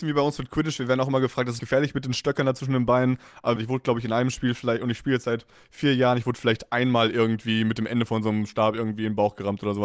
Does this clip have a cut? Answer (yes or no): yes